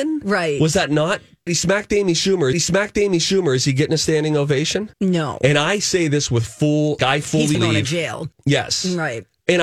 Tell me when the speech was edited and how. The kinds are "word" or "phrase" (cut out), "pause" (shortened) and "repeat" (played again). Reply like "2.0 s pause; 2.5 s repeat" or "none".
1.5 s phrase; 2.5 s repeat; 4.9 s pause; 7.0 s word; 7.5 s word; 8.3 s pause